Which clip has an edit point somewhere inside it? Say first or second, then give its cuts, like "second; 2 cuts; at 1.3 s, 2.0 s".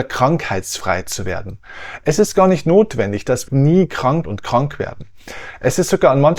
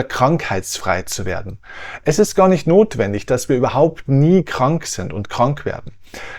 first; 2 cuts; at 3.5 s, 4.2 s